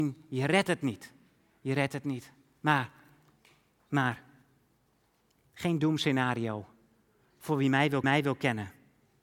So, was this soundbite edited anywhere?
yes; 1 cut; at 8.0 s

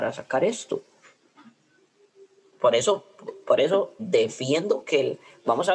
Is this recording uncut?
no; 2 cuts; at 2.5 s, 4.0 s

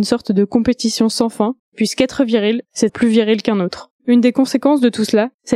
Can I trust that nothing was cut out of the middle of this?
no; 3 cuts; at 1.6 s, 2.9 s, 4.0 s

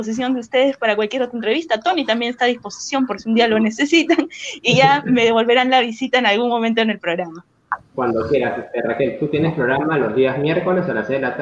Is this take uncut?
yes; 0 cuts

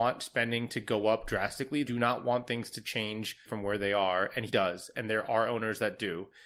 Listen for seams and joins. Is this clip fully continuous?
no; 3 cuts; at 1.8 s, 3.5 s, 4.5 s

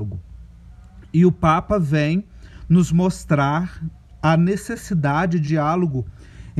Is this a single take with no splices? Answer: no; 1 cut; at 5.4 s

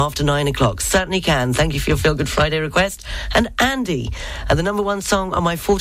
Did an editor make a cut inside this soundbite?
no; 0 cuts

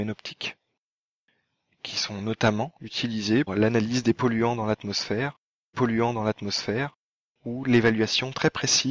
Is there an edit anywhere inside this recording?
yes; 2 cuts; at 3.5 s, 5.7 s

